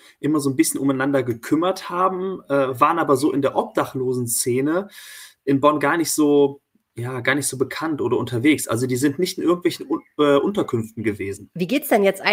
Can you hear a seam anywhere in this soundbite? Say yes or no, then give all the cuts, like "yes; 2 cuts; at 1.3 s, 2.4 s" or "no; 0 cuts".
no; 0 cuts